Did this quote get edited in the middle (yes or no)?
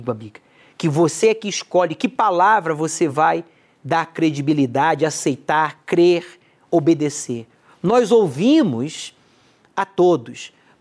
no